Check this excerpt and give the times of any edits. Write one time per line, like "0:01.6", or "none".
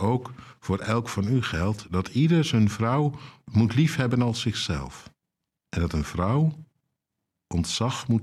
none